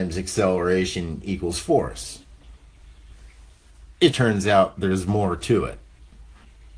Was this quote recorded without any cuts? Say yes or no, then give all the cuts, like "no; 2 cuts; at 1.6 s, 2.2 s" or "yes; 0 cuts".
no; 1 cut; at 4.1 s